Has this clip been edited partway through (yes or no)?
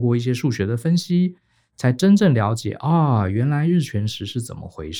no